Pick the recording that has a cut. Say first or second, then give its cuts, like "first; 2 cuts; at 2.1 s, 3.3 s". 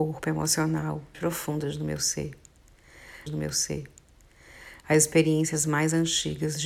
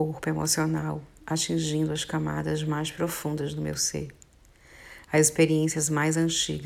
first; 2 cuts; at 1.1 s, 3.3 s